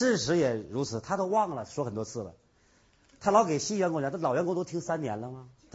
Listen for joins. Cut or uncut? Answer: uncut